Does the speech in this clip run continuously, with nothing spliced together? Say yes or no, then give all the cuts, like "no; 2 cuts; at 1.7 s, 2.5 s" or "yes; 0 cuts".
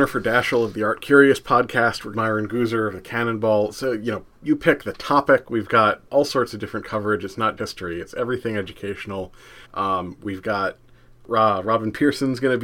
no; 4 cuts; at 2.1 s, 6.1 s, 7.6 s, 9.6 s